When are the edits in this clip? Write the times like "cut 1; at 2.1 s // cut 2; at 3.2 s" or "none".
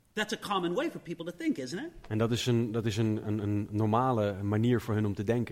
none